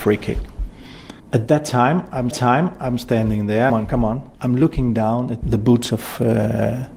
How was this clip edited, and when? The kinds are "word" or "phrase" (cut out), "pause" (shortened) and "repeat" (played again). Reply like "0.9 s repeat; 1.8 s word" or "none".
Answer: 1.2 s pause; 2.3 s repeat; 3.7 s phrase; 4.3 s pause; 5.4 s word